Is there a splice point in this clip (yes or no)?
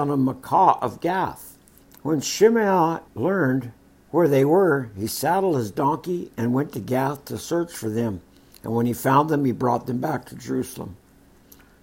yes